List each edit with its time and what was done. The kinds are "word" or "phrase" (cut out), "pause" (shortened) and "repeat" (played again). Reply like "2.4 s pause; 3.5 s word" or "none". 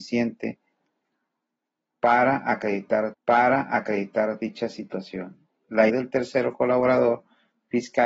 3.1 s repeat; 5.9 s word